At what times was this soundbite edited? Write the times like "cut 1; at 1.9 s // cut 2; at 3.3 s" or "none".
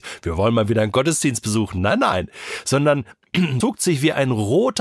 cut 1; at 3.6 s